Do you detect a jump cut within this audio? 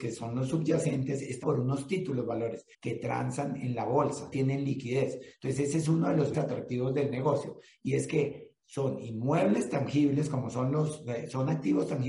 yes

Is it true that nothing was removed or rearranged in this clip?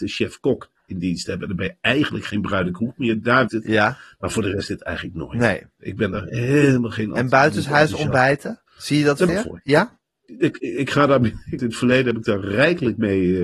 no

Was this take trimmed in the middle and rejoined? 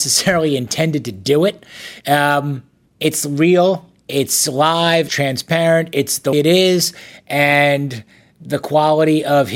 yes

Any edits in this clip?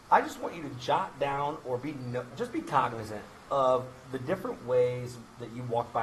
yes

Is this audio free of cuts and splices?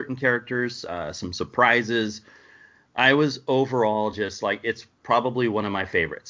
yes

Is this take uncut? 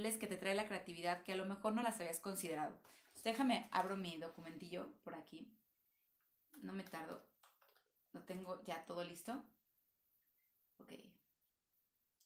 yes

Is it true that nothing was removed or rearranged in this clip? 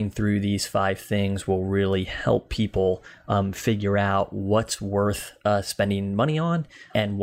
yes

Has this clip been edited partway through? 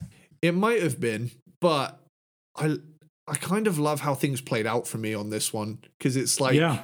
no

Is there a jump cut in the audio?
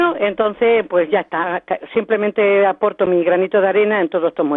no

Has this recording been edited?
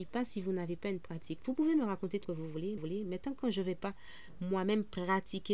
yes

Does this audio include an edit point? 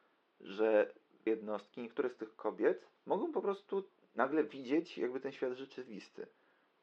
yes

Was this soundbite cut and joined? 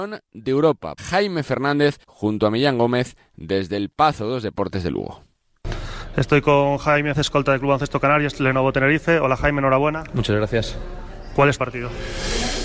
yes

